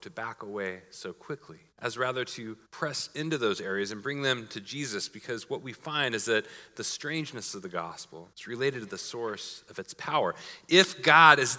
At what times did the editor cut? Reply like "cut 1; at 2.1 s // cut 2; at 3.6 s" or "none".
cut 1; at 1.7 s // cut 2; at 2.6 s // cut 3; at 8.3 s